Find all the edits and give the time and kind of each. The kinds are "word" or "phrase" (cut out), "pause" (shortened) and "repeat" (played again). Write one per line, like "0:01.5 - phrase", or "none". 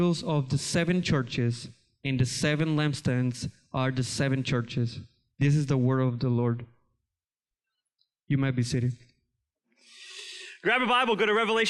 none